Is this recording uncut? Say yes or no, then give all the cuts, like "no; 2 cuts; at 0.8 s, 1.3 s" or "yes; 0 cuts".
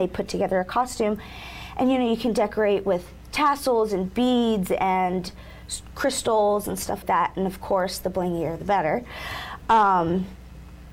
no; 1 cut; at 7.0 s